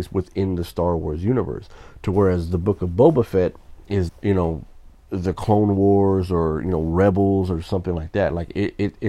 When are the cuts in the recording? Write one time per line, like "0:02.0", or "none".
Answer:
0:04.1